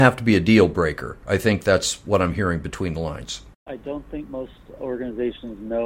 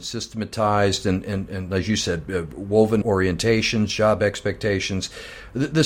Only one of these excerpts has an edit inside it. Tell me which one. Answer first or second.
second